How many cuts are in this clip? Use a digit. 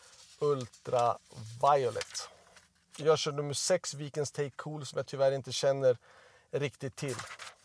0